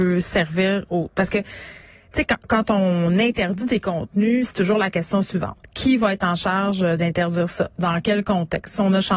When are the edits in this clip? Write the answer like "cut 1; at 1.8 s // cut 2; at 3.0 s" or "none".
none